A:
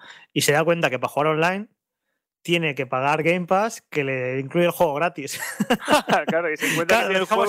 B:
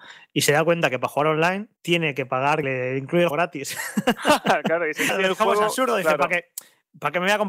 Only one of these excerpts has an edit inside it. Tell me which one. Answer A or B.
B